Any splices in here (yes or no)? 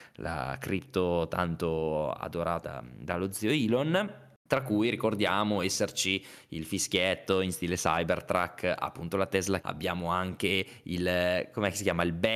yes